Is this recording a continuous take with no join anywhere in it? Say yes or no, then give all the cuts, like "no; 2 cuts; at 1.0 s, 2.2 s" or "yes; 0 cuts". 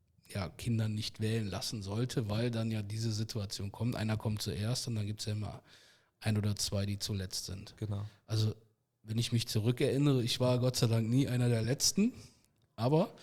yes; 0 cuts